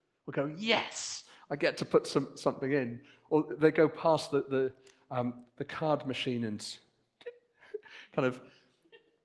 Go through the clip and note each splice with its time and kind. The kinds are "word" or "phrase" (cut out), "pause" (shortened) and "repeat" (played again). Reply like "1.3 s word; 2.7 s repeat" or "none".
5.5 s pause